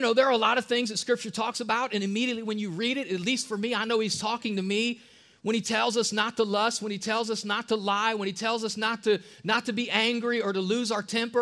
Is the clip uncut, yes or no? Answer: yes